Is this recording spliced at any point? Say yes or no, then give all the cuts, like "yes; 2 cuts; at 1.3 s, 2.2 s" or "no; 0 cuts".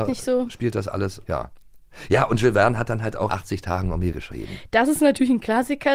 yes; 3 cuts; at 1.2 s, 3.3 s, 4.1 s